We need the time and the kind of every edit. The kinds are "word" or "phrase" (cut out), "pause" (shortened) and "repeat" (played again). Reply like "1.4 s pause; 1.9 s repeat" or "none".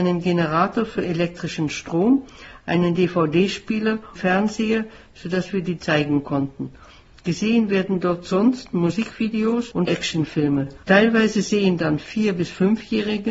4.2 s word; 5.8 s word; 9.9 s word